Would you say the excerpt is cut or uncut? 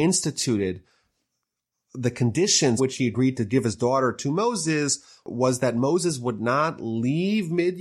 cut